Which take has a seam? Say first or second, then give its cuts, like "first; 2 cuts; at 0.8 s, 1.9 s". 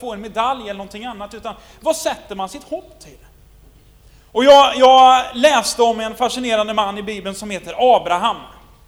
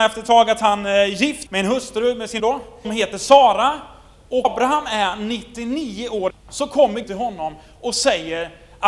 second; 6 cuts; at 1.5 s, 2.4 s, 2.8 s, 4.4 s, 6.3 s, 7.0 s